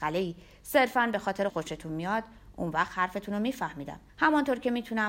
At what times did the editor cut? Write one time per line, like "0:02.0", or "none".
0:01.5
0:04.1